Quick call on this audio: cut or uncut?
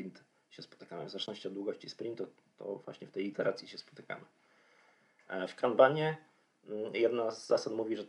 uncut